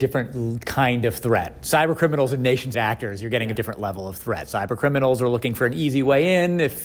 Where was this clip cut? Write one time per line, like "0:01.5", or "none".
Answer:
0:02.7
0:03.5